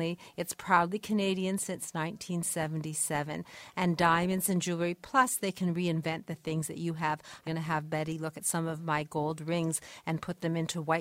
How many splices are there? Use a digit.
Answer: 1